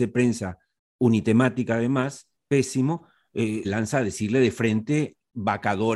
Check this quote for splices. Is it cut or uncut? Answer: cut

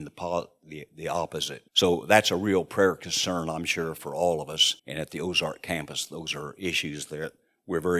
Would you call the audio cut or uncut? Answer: cut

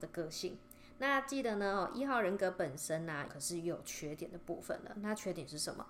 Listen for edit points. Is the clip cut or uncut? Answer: cut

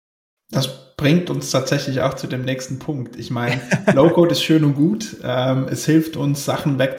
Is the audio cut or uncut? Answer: uncut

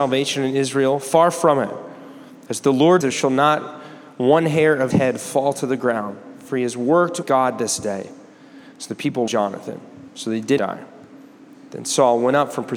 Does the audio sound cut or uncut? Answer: cut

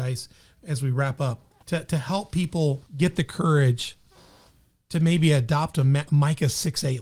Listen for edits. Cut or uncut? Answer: cut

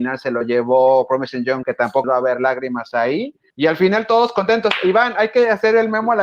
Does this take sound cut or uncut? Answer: cut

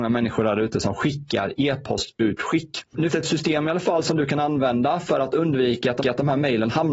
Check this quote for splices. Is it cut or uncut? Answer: cut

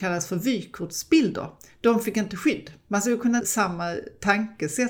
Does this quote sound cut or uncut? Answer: cut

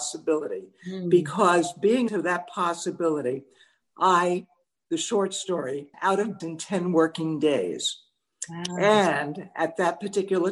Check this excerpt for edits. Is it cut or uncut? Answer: cut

